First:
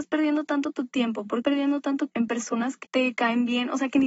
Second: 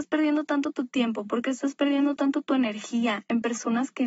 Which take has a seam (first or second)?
first